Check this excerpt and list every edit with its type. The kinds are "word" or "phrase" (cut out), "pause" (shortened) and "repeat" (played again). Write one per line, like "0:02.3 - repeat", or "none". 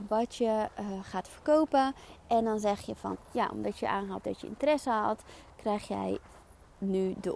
0:03.1 - phrase
0:04.2 - word